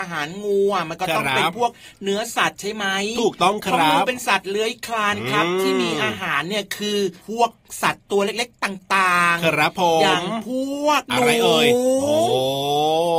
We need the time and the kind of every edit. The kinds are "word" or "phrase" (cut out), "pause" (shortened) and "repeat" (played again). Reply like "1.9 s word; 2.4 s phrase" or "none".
7.2 s pause; 11.1 s pause